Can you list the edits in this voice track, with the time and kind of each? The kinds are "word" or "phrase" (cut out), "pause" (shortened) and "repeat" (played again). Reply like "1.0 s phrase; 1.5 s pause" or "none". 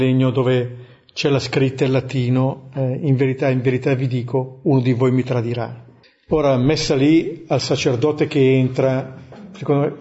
6.0 s pause